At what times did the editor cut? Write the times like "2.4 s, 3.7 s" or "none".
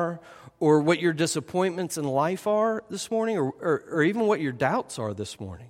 none